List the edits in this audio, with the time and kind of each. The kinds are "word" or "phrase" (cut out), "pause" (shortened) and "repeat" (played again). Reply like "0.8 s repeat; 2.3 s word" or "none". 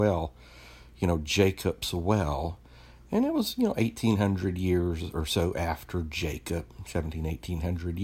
none

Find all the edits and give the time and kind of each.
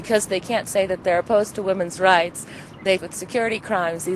3.0 s phrase

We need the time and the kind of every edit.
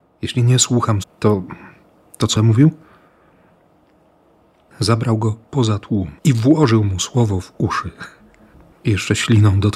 1.0 s word; 2.4 s word; 6.2 s pause

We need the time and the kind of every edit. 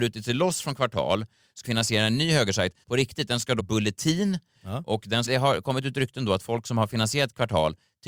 1.6 s word; 2.8 s phrase; 3.6 s word; 5.3 s phrase

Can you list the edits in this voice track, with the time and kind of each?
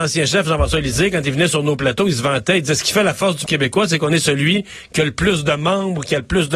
3.5 s word

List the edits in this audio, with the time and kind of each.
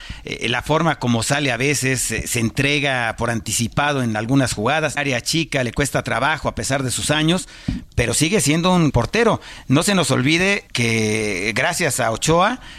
5.0 s phrase; 8.9 s word; 10.7 s pause

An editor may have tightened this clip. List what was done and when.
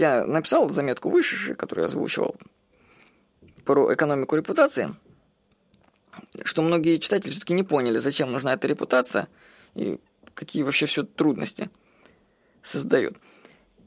none

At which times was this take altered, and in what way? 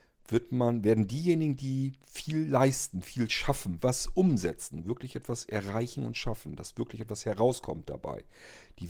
3.8 s word

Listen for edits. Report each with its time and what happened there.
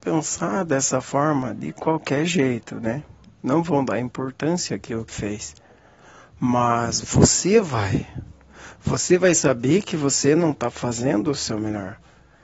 3.2 s pause; 5.1 s word

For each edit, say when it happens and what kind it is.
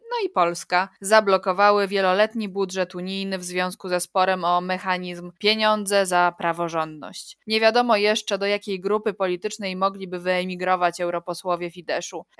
none

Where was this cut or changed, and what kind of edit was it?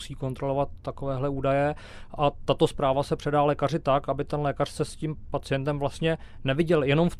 none

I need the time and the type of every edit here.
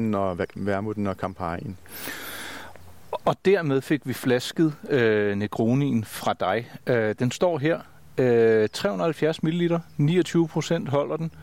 none

